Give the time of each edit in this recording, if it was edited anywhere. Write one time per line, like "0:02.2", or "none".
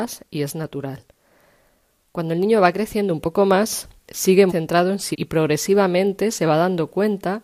0:04.5
0:05.1